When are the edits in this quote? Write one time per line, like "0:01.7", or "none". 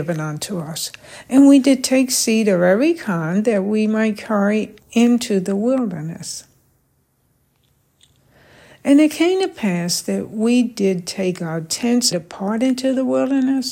0:12.1